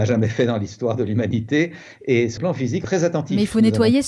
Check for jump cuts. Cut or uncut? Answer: cut